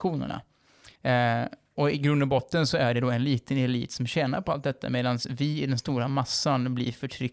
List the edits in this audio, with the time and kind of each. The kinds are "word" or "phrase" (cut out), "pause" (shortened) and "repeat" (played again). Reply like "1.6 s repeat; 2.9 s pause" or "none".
1.0 s pause